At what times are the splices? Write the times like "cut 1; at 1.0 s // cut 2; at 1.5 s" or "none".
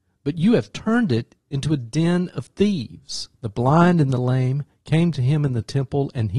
cut 1; at 3.3 s

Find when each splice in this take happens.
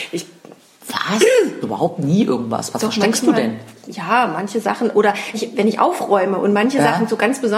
cut 1; at 1.6 s // cut 2; at 5.3 s

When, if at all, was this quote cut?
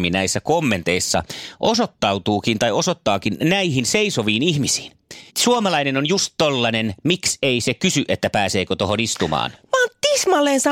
cut 1; at 5.3 s

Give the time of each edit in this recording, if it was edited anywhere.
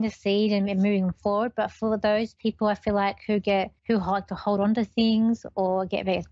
cut 1; at 3.8 s

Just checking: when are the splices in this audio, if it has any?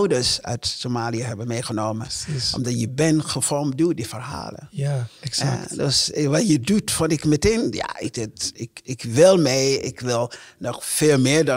none

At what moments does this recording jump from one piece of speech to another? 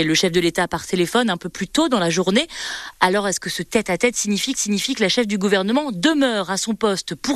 cut 1; at 4.5 s

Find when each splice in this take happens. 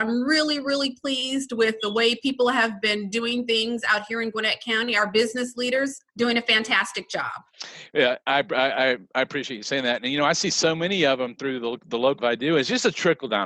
cut 1; at 6.1 s // cut 2; at 12.2 s

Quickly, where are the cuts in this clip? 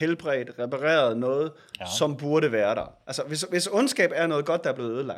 none

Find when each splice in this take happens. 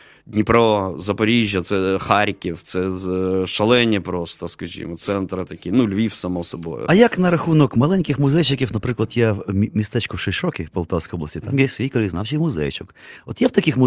none

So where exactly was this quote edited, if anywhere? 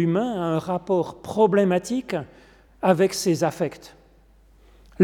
none

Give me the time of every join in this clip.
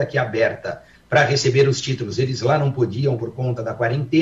cut 1; at 3.2 s

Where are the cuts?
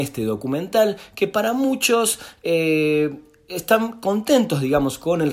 none

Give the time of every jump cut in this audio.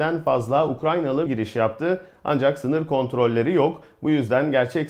cut 1; at 1.3 s

